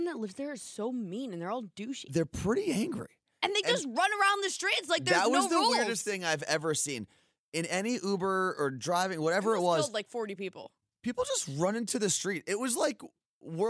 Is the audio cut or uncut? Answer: uncut